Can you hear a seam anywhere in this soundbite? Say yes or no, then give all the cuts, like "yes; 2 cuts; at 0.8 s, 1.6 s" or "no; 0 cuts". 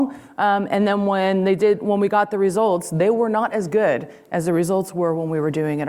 no; 0 cuts